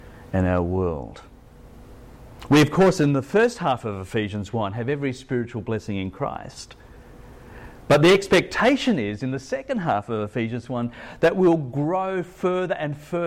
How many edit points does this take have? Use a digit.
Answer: 0